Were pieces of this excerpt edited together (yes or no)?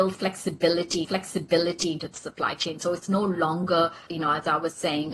yes